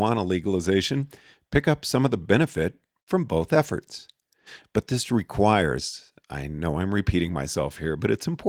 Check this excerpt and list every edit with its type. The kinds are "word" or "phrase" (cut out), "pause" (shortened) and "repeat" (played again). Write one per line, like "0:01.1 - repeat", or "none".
none